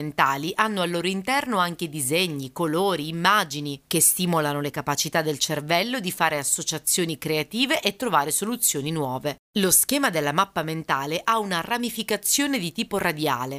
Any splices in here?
yes; 1 cut; at 9.4 s

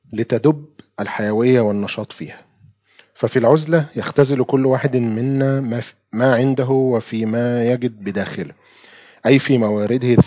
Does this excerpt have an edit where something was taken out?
no; 0 cuts

